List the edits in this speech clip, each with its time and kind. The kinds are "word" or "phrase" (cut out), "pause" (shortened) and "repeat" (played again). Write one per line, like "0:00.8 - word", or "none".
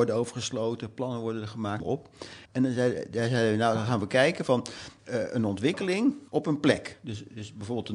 0:01.8 - word
0:02.4 - pause
0:05.0 - pause
0:06.3 - pause